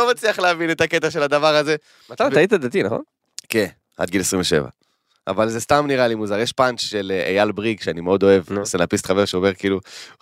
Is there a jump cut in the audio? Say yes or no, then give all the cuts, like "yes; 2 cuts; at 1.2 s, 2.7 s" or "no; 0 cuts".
no; 0 cuts